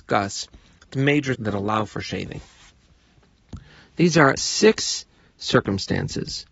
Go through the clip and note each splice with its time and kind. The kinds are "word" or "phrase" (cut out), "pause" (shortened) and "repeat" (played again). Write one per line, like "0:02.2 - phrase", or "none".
0:00.9 - word
0:01.3 - word
0:04.4 - word